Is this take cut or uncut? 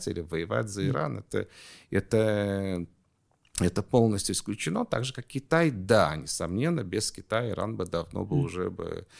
uncut